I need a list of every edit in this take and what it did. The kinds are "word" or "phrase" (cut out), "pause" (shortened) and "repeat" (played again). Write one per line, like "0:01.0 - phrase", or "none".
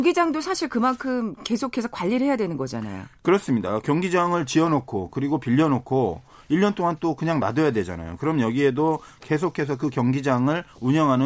none